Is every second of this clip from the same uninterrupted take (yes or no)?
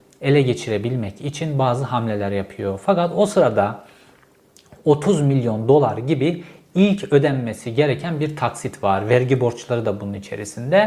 yes